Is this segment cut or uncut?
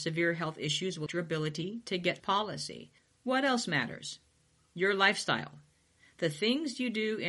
cut